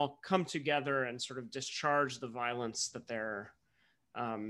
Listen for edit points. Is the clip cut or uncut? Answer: uncut